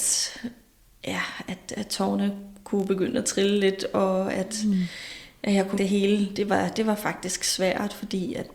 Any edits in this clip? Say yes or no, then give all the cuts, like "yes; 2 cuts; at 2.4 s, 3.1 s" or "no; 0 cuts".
yes; 1 cut; at 5.8 s